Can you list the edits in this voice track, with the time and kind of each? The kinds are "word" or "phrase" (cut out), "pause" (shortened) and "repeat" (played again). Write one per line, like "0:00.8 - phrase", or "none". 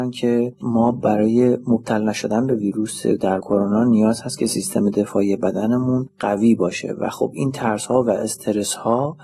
0:03.4 - word